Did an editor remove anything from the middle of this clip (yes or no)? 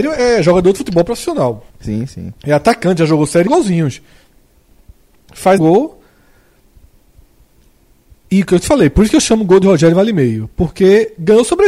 yes